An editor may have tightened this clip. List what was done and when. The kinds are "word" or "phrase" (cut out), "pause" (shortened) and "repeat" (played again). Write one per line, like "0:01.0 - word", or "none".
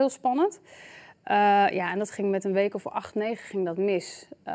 none